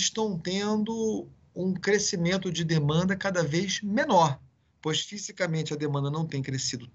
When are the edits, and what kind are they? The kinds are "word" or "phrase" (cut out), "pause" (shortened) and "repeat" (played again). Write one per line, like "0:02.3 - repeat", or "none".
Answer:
none